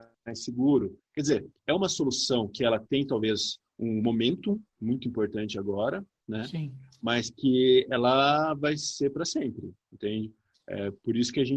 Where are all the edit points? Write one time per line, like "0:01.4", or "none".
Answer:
none